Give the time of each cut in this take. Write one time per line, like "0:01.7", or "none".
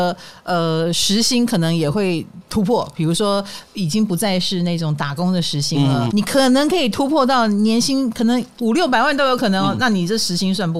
0:06.1

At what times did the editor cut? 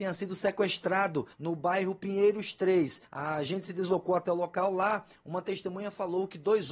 0:01.3
0:03.0

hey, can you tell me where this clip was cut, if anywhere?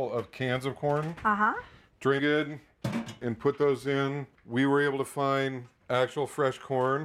0:02.2

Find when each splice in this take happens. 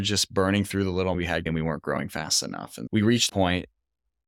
0:01.1
0:01.5
0:02.9
0:03.3

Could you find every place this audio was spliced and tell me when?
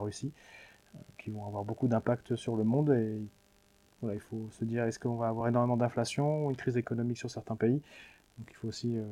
none

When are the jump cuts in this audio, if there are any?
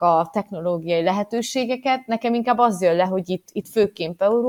none

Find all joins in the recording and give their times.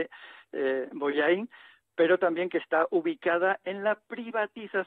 none

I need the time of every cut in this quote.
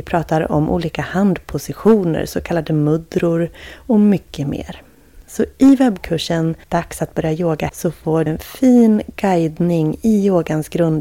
0:06.6
0:07.7
0:08.3

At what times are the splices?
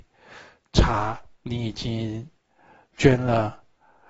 0:01.3

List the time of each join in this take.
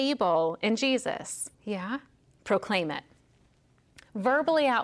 0:01.5

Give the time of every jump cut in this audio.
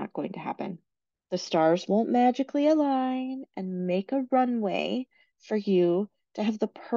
none

